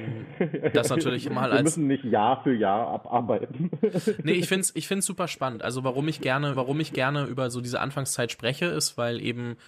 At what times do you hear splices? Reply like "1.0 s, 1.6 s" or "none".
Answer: 1.2 s, 6.5 s